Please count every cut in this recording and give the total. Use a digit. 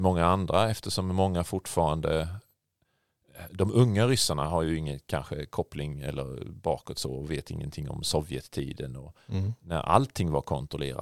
0